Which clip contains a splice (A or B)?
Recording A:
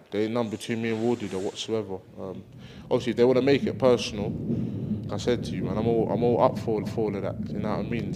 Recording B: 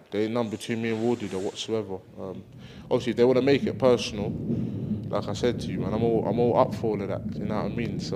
A